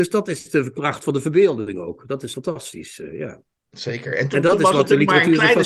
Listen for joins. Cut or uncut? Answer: cut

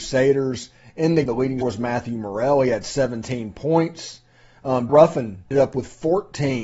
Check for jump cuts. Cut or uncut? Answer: cut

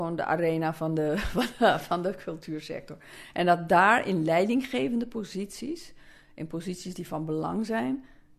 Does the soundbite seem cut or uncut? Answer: uncut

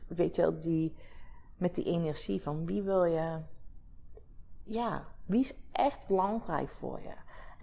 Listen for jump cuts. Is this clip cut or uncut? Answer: uncut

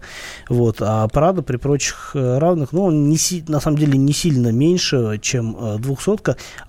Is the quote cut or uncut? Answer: uncut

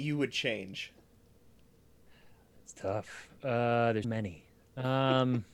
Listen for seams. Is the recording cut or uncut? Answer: cut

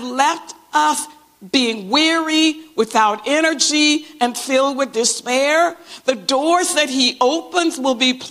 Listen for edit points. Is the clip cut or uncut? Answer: uncut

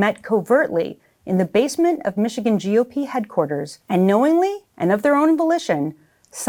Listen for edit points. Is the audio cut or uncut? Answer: cut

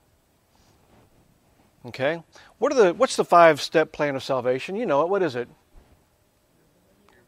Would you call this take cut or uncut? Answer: uncut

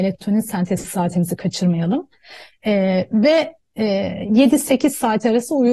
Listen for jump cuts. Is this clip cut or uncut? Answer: uncut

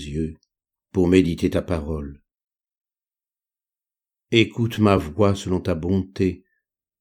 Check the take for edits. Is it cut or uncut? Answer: uncut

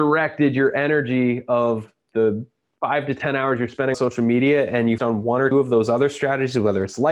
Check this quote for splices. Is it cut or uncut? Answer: cut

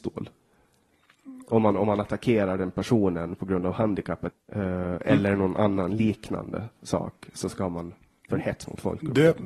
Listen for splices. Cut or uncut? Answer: cut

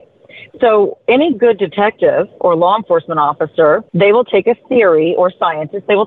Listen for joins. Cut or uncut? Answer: cut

